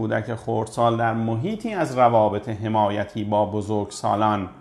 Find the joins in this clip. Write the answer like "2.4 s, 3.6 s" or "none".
none

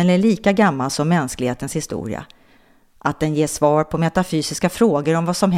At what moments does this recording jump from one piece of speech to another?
none

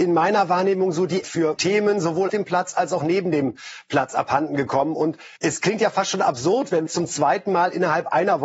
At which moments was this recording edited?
1.2 s, 1.6 s, 2.3 s, 5.4 s, 6.9 s

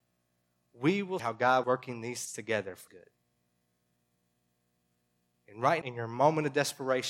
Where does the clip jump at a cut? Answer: 1.2 s, 1.6 s, 2.3 s, 2.9 s, 5.8 s

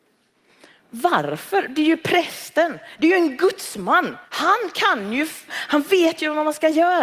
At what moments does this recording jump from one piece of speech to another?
4.2 s, 5.5 s

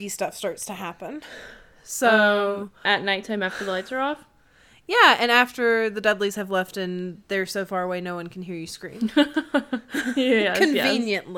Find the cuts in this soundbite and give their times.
none

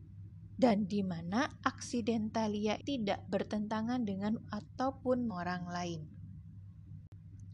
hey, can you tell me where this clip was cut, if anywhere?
2.8 s, 4.4 s, 5.3 s

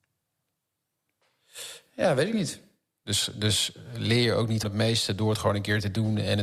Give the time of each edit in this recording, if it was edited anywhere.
4.6 s

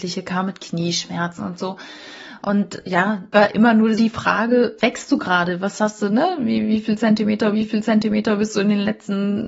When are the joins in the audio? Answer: 1.4 s, 3.3 s, 4.0 s, 4.8 s, 7.5 s

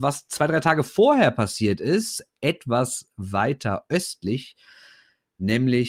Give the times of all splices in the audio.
none

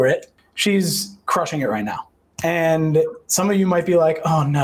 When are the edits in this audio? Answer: none

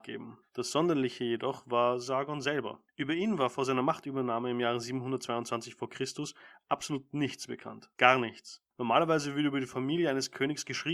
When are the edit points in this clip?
2.9 s, 7.9 s, 8.7 s

